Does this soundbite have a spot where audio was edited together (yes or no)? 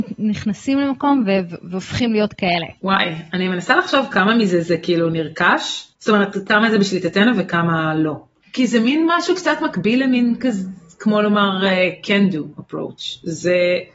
yes